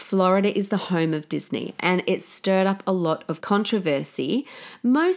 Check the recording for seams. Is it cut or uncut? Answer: cut